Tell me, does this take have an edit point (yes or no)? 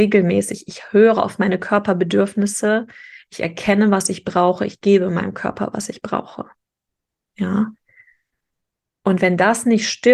no